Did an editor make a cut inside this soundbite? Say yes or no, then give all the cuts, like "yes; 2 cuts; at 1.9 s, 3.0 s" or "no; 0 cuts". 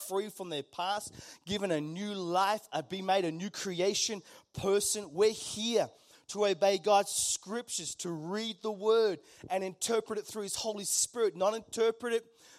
no; 0 cuts